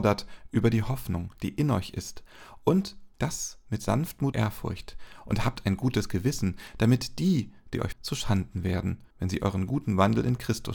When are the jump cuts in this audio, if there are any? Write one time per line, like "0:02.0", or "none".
0:03.1
0:04.3
0:07.9
0:09.1